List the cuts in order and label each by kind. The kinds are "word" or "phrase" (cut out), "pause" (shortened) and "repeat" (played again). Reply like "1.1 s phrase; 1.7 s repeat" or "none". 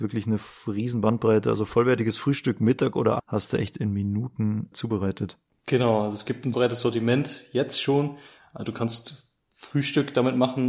3.2 s word; 4.7 s word; 6.5 s word